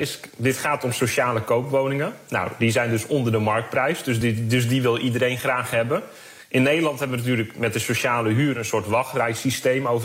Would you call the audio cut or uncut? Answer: uncut